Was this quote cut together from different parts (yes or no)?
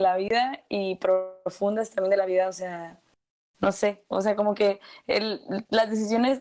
no